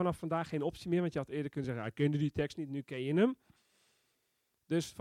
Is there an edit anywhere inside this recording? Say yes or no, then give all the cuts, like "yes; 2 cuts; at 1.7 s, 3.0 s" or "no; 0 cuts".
no; 0 cuts